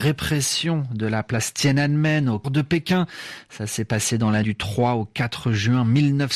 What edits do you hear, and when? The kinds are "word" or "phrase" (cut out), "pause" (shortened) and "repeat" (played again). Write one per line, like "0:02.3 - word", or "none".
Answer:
0:02.4 - word
0:04.4 - word